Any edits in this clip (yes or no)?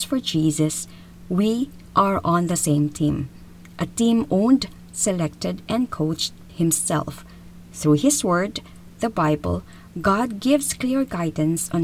yes